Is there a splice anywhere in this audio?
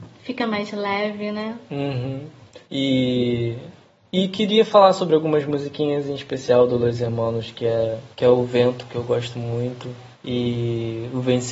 yes; 3 cuts; at 2.6 s, 8.1 s, 10.1 s

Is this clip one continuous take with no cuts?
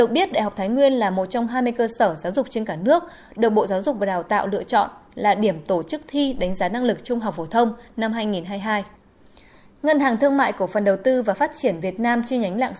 yes; 0 cuts

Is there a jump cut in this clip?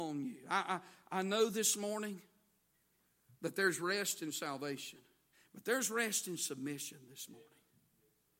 yes; 1 cut; at 5.3 s

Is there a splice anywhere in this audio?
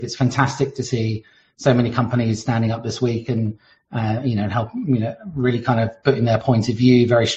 no; 0 cuts

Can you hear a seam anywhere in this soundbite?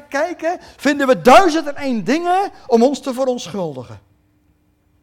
no; 0 cuts

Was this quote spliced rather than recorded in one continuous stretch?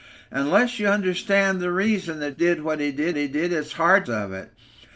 yes; 3 cuts; at 2.3 s, 3.1 s, 4.1 s

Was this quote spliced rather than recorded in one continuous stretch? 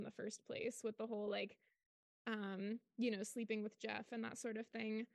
no; 0 cuts

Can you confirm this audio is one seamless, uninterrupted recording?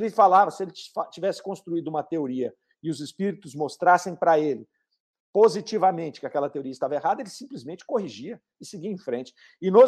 yes; 0 cuts

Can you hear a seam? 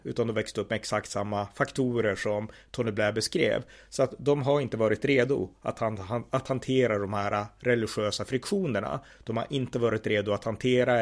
no; 0 cuts

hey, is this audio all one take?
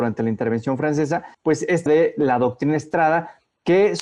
no; 2 cuts; at 1.3 s, 1.9 s

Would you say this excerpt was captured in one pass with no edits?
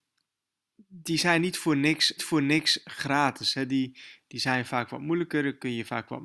no; 1 cut; at 2.2 s

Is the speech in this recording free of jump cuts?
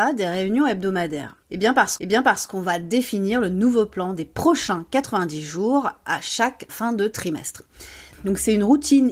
no; 3 cuts; at 1.4 s, 2.0 s, 6.7 s

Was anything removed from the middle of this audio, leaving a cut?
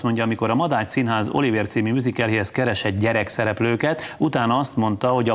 no; 0 cuts

